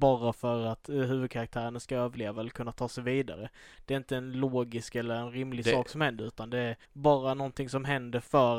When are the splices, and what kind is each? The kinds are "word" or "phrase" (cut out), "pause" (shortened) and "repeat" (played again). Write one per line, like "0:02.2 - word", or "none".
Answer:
0:06.8 - pause